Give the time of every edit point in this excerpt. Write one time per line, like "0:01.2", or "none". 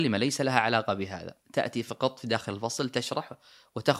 0:01.4